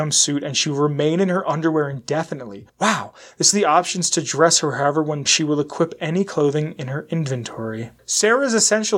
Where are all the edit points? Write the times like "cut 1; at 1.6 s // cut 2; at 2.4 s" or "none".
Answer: cut 1; at 2.7 s // cut 2; at 3.5 s // cut 3; at 5.3 s